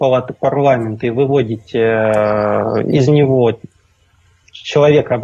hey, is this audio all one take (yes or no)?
yes